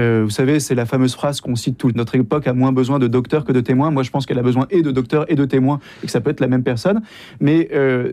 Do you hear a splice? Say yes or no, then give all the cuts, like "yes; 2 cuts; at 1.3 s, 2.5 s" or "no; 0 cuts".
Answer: yes; 1 cut; at 1.9 s